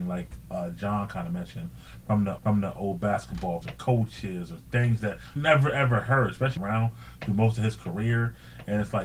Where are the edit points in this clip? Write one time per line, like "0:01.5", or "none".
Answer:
0:02.4
0:03.6
0:05.4
0:06.6